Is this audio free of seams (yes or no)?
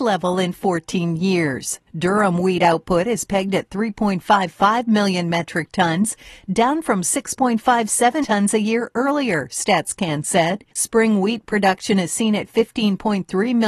no